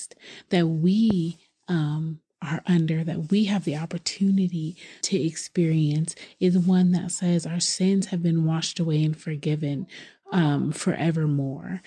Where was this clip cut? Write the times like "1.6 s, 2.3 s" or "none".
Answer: 5.0 s